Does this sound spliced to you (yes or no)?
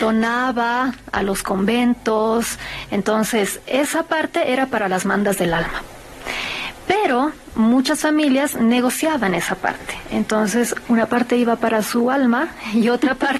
no